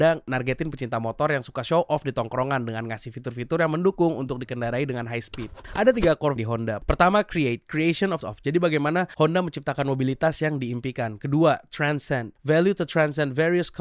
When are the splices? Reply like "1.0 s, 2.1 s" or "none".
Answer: 6.4 s, 8.2 s